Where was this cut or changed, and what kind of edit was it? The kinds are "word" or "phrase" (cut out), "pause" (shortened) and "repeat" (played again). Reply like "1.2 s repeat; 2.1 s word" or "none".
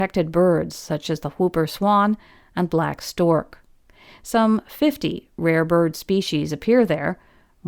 none